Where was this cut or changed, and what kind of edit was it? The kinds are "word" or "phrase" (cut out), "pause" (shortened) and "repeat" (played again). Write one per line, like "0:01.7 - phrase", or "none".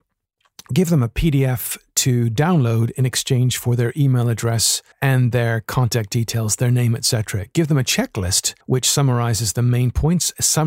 0:04.9 - pause
0:08.6 - pause